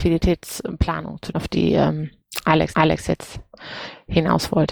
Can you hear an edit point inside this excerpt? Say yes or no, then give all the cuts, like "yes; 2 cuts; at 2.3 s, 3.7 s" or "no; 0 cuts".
yes; 2 cuts; at 1.3 s, 2.7 s